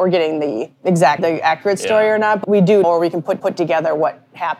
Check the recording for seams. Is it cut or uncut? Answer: cut